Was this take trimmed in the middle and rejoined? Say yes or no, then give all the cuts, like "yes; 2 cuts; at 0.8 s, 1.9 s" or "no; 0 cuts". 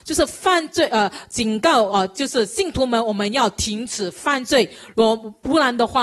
no; 0 cuts